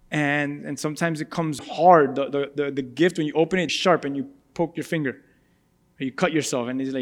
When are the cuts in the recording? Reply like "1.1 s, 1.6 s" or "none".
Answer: 1.6 s, 3.7 s